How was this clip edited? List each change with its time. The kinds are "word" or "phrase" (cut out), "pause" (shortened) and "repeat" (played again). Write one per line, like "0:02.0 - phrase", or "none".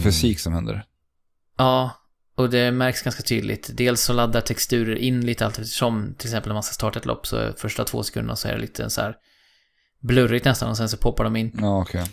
none